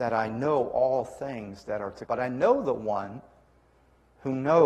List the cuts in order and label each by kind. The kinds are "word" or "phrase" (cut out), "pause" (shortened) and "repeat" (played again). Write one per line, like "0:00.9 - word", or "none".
0:02.1 - word